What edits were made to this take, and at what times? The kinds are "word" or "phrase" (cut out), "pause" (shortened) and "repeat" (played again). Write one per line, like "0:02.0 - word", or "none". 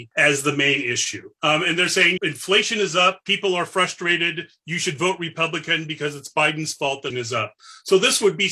0:02.2 - phrase
0:07.1 - word